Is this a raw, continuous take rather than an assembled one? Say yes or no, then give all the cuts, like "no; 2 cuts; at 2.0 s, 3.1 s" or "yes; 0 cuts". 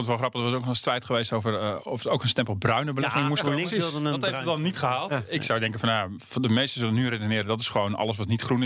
yes; 0 cuts